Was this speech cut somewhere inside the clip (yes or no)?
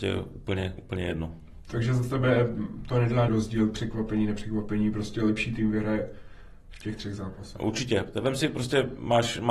yes